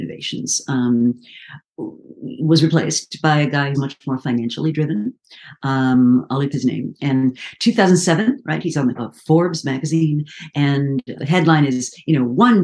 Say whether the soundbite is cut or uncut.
cut